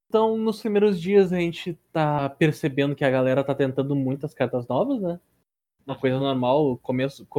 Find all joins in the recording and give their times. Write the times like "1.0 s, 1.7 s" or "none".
none

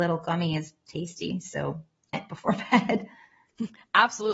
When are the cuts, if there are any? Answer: 2.1 s

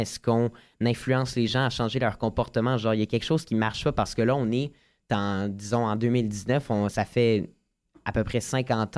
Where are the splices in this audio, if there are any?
none

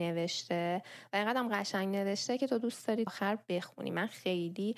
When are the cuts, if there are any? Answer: 3.1 s

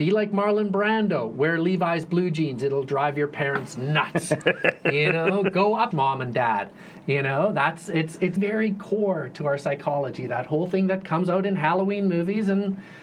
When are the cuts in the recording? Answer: 5.9 s, 8.4 s

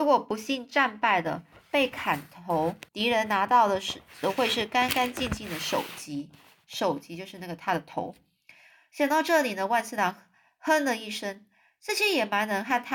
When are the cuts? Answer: 2.9 s

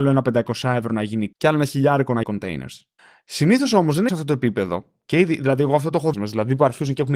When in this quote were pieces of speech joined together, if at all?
1.3 s, 2.2 s, 3.0 s, 4.1 s, 6.1 s

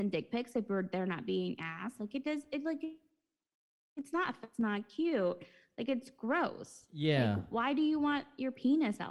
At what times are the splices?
none

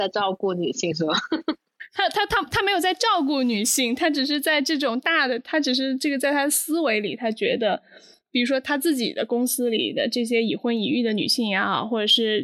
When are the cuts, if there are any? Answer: none

